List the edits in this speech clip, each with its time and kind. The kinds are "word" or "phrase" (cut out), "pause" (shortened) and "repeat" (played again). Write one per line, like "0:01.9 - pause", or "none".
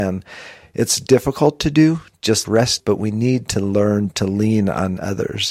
0:02.4 - word
0:02.8 - word